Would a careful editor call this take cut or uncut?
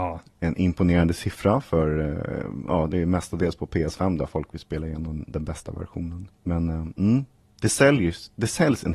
cut